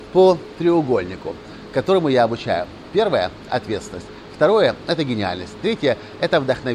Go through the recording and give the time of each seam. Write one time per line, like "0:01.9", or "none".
0:03.5

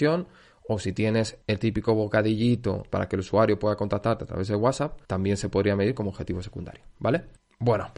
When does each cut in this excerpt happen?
0:05.0

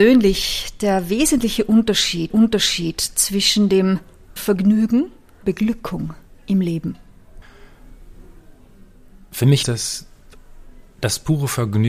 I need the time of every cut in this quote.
0:02.3
0:04.4
0:05.4
0:09.6

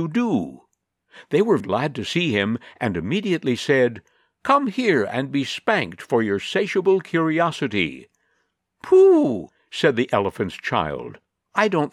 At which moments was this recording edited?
0:01.6

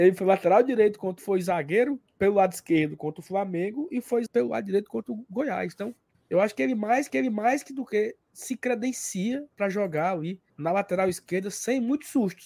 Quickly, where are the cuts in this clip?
0:01.2
0:02.1
0:04.3
0:06.1
0:07.1
0:09.5
0:10.5

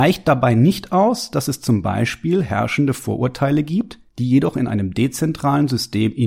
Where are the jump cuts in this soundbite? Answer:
0:04.1

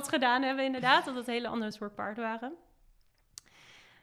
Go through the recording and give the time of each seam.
none

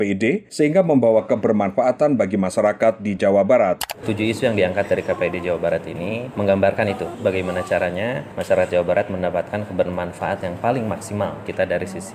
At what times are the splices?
none

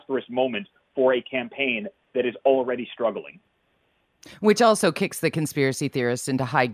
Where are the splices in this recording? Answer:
none

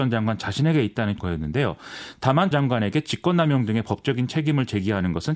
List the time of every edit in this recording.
0:01.2
0:02.5

